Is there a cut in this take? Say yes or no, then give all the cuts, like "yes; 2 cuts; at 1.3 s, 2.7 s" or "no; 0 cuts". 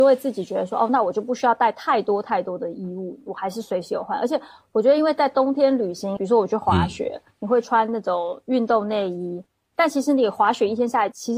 no; 0 cuts